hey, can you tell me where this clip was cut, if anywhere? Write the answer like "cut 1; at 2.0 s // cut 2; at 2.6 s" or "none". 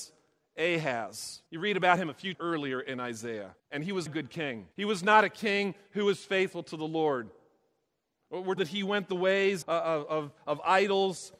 cut 1; at 1.5 s // cut 2; at 2.3 s // cut 3; at 3.6 s // cut 4; at 4.1 s // cut 5; at 4.7 s // cut 6; at 8.6 s // cut 7; at 9.6 s